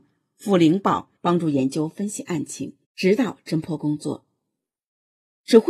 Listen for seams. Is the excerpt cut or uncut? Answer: cut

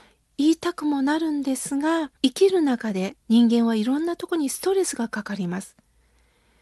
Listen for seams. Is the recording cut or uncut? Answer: cut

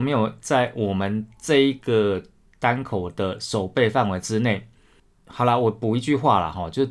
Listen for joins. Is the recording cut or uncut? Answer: uncut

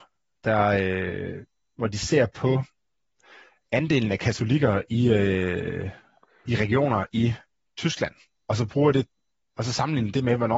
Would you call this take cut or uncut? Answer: uncut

